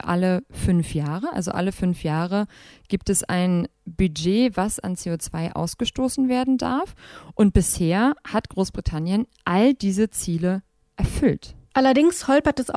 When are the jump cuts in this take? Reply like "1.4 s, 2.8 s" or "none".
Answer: none